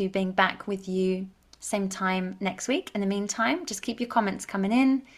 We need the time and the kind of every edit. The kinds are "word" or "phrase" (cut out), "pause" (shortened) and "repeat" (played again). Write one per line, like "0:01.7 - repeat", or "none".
none